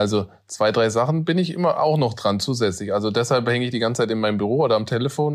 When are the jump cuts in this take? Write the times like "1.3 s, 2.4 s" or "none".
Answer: none